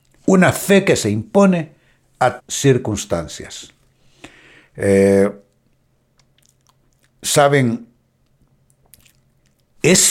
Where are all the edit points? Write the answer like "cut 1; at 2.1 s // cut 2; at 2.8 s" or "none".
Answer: cut 1; at 2.4 s